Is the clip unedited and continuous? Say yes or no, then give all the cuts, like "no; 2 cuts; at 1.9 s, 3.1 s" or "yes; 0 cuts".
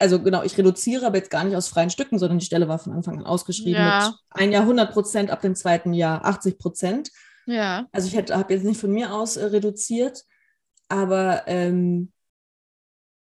yes; 0 cuts